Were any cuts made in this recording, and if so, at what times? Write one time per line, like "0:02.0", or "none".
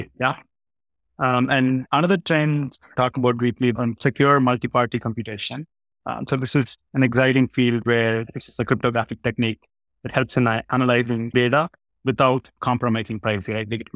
0:03.0
0:03.8
0:11.3
0:12.6